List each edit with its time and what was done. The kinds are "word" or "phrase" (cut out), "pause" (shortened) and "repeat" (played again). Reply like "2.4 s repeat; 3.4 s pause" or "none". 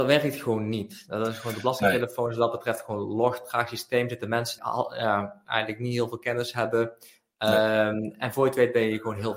4.6 s word